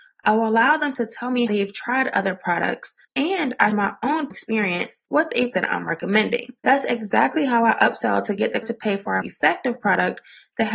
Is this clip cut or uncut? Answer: cut